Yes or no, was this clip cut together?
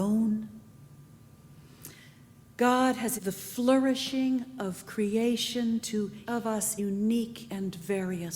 yes